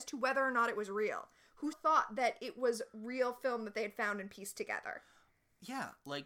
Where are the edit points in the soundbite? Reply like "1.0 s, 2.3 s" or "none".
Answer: 1.7 s